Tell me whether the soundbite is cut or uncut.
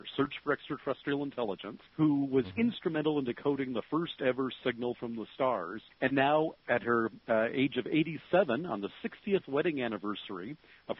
cut